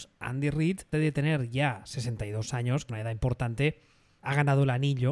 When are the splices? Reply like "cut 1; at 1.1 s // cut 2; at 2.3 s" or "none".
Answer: cut 1; at 0.9 s // cut 2; at 2.9 s // cut 3; at 4.2 s